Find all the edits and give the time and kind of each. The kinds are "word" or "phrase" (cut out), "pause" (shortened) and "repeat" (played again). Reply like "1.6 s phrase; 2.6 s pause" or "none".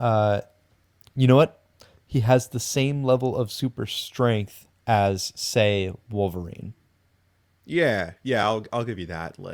none